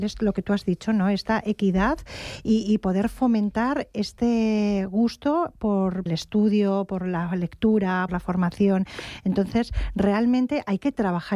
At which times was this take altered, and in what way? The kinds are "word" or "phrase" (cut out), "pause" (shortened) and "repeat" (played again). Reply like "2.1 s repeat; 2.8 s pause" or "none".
6.1 s phrase; 8.1 s phrase